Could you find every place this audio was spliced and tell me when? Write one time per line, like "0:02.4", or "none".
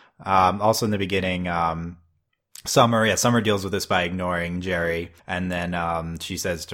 0:05.2